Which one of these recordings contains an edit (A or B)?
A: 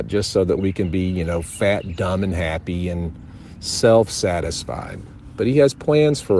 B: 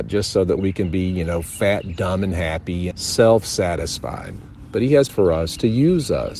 B